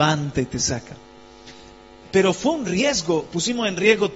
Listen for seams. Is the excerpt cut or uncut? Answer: uncut